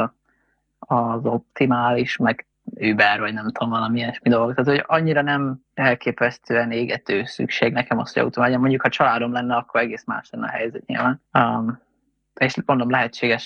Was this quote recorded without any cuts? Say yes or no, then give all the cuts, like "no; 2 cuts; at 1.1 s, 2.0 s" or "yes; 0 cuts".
no; 3 cuts; at 2.5 s, 5.7 s, 11.3 s